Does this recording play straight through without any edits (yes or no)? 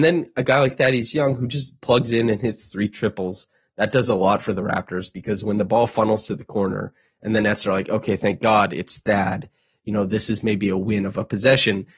yes